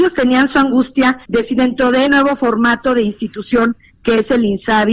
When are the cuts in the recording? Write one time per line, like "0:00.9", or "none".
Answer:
0:01.2
0:02.1